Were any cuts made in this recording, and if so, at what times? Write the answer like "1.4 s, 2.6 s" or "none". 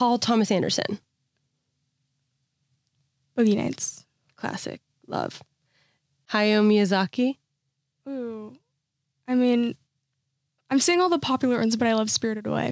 none